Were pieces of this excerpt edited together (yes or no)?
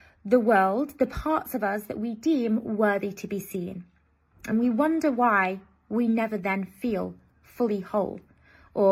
no